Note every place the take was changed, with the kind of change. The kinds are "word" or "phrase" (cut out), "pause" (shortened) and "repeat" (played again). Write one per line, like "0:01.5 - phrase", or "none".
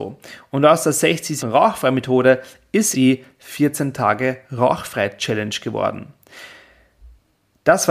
0:01.4 - word
0:02.9 - word